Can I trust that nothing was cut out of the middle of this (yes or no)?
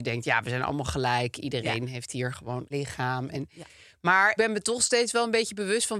no